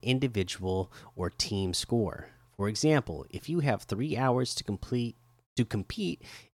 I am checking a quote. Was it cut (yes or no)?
no